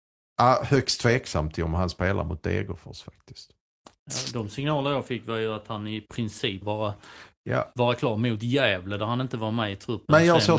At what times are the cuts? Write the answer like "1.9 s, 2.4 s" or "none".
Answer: 6.6 s